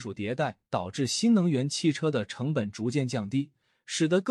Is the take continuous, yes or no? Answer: yes